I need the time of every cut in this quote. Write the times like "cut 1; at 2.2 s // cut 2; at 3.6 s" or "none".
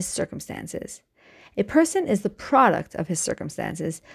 none